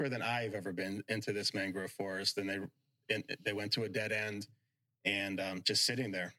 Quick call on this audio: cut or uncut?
uncut